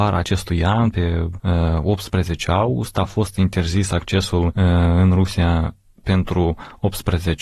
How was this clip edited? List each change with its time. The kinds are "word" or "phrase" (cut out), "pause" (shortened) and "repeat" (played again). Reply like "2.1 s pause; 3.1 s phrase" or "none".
none